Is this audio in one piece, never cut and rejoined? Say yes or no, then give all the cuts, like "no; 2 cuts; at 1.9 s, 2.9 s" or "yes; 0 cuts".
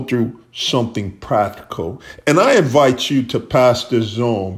yes; 0 cuts